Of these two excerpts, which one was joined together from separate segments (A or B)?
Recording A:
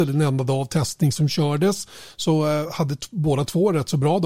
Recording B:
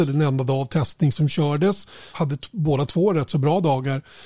B